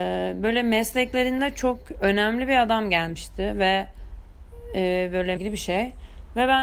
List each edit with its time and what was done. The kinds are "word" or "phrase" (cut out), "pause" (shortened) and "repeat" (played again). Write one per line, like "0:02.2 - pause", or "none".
0:05.4 - word